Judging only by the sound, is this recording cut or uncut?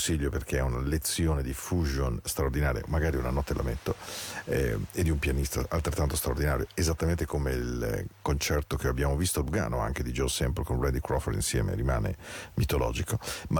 uncut